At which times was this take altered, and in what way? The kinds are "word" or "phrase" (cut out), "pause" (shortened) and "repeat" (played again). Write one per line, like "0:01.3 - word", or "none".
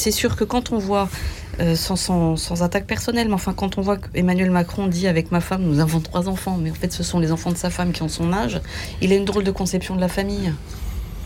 none